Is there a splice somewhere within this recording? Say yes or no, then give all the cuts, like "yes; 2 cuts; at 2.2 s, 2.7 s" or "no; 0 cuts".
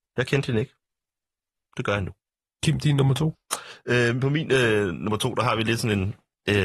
no; 0 cuts